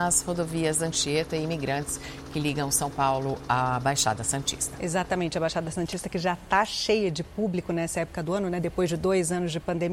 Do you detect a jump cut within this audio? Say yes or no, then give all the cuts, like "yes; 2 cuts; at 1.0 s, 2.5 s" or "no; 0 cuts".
no; 0 cuts